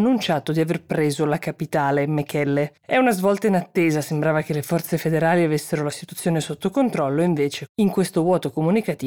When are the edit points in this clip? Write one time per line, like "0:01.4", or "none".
0:02.8